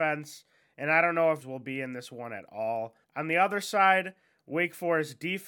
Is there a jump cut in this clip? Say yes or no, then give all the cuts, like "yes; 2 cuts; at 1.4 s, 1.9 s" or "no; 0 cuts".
yes; 2 cuts; at 1.4 s, 3.0 s